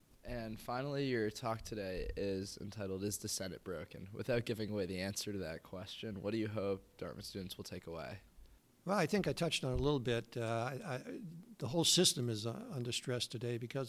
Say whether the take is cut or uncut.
uncut